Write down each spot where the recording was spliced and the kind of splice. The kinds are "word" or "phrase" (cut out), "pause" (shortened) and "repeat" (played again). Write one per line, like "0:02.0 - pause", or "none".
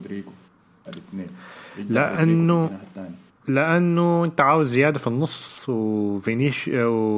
none